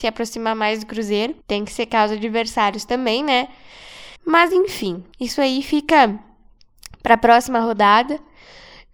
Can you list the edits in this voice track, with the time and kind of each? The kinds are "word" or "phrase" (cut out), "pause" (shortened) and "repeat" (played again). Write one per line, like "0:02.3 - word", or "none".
0:01.4 - pause
0:04.2 - pause
0:05.1 - pause